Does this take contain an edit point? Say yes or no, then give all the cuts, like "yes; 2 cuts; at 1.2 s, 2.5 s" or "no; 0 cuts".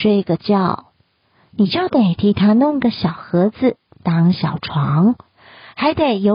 no; 0 cuts